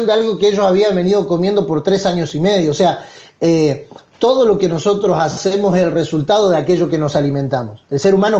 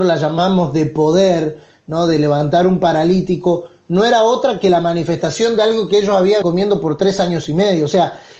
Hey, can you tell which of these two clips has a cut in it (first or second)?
second